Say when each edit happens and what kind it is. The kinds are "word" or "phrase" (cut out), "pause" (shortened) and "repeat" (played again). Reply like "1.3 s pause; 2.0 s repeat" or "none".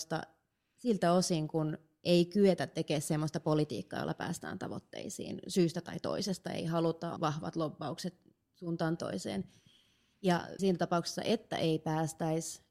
7.2 s word; 9.0 s word; 10.6 s word